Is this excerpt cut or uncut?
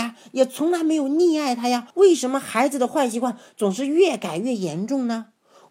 cut